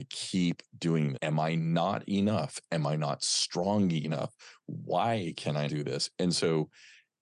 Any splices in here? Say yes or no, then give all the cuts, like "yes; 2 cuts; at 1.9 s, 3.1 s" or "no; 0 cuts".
yes; 2 cuts; at 1.1 s, 5.7 s